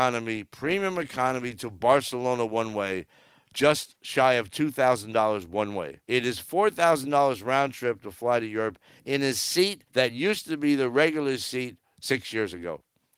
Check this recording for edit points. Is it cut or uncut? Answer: cut